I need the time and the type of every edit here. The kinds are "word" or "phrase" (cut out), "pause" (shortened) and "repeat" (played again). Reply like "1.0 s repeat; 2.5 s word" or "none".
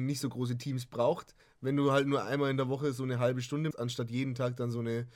1.4 s pause; 3.7 s phrase